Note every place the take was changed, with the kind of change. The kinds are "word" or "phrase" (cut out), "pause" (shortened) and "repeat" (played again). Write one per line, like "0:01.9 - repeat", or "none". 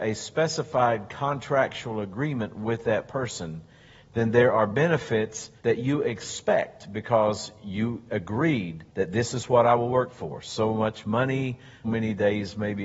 0:05.6 - pause
0:08.9 - pause
0:11.8 - word